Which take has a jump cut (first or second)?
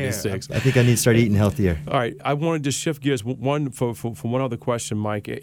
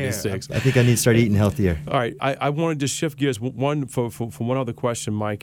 first